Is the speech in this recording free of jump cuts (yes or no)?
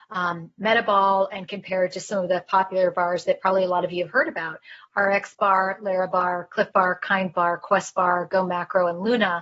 yes